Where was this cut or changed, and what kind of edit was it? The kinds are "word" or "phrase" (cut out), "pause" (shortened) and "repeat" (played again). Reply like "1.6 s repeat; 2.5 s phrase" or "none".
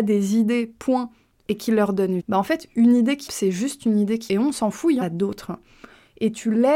2.2 s word; 3.3 s word; 4.3 s word; 5.0 s word

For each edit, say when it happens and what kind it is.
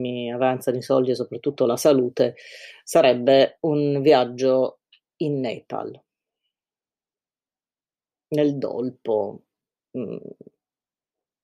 none

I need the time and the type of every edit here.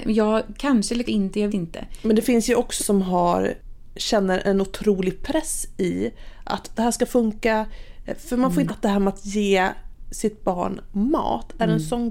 1.1 s word; 1.5 s word; 2.8 s word; 6.8 s word; 8.7 s word

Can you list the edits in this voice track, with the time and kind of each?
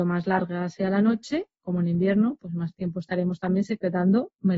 none

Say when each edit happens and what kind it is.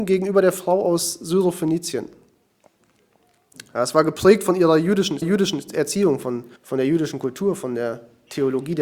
5.2 s repeat; 6.6 s pause

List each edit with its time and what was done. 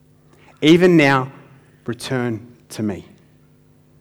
none

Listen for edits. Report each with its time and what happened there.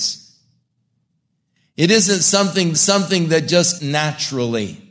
2.7 s repeat; 3.8 s word

